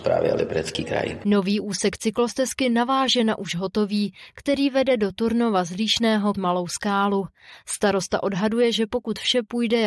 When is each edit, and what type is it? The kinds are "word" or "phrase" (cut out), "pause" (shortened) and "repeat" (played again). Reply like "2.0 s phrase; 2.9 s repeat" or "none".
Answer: 6.3 s word